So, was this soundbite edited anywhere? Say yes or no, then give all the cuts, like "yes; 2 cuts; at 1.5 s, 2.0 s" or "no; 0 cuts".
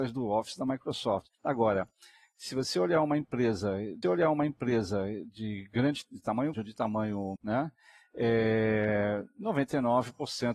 yes; 4 cuts; at 1.3 s, 4.0 s, 6.5 s, 7.4 s